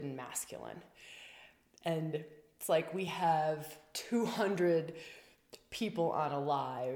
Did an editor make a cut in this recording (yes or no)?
no